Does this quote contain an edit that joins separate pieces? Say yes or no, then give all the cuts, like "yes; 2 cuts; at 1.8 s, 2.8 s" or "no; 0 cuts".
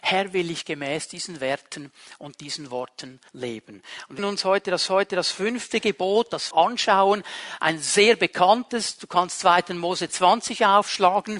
yes; 4 cuts; at 3.3 s, 4.2 s, 4.9 s, 6.5 s